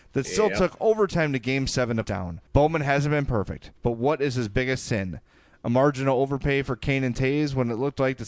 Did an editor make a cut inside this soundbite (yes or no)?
yes